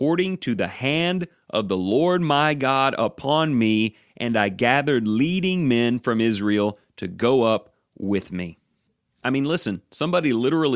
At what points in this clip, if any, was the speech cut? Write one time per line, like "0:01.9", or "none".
none